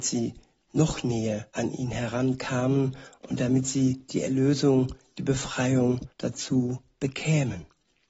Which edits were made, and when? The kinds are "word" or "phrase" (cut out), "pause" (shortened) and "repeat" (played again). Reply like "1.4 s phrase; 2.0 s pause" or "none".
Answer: 1.5 s pause; 6.1 s pause